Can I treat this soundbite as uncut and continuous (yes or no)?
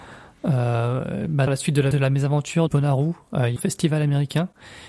no